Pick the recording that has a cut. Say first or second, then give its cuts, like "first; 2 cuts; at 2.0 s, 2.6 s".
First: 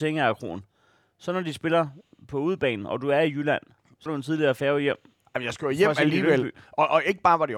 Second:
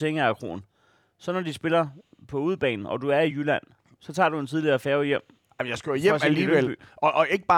first; 1 cut; at 4.1 s